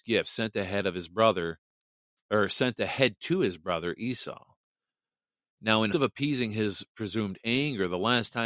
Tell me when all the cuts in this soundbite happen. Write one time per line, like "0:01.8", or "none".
0:05.9